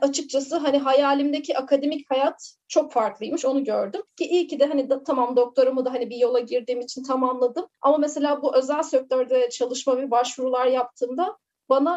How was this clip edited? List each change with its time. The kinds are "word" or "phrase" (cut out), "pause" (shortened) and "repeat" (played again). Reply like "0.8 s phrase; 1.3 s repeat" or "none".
4.1 s pause; 7.7 s pause